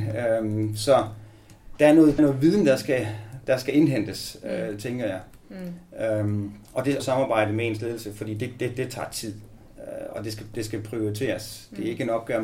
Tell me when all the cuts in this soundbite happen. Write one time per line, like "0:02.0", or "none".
0:02.2
0:06.6
0:07.0
0:09.7